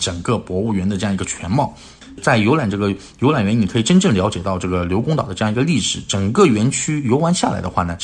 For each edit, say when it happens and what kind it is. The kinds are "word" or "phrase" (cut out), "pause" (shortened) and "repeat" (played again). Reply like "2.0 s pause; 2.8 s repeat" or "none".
none